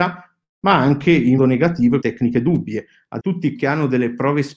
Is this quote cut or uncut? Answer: cut